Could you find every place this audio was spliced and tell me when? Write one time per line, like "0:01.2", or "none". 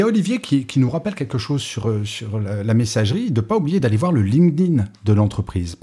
none